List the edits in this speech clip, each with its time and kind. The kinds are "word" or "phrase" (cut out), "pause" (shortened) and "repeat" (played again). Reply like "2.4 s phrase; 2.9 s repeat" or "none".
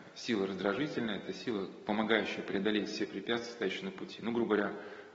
none